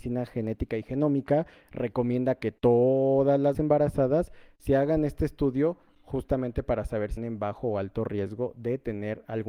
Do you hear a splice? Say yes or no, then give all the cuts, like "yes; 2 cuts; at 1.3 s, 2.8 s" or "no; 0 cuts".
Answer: yes; 2 cuts; at 3.5 s, 7.2 s